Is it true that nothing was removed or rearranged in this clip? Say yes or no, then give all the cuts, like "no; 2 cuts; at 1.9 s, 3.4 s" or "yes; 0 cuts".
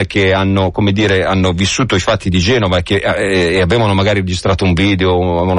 yes; 0 cuts